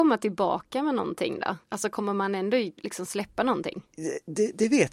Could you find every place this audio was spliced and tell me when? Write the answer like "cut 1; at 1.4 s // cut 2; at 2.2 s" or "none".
cut 1; at 1.6 s